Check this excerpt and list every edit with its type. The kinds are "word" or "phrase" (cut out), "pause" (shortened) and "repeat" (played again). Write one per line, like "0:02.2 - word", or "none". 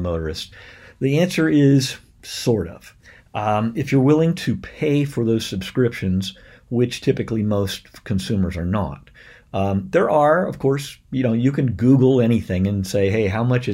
none